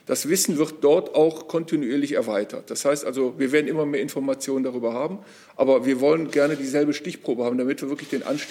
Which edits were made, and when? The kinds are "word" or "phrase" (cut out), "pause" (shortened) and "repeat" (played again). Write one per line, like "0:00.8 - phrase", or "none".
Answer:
none